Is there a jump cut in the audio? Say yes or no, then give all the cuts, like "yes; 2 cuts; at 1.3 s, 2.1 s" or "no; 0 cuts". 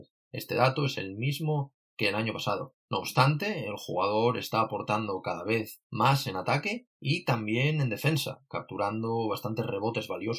yes; 1 cut; at 2.8 s